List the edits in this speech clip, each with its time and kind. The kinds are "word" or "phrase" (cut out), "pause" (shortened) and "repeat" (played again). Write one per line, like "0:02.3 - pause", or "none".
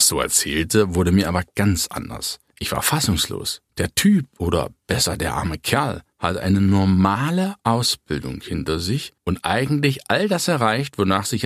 0:02.5 - pause
0:03.7 - pause
0:06.1 - pause
0:07.6 - pause
0:09.2 - pause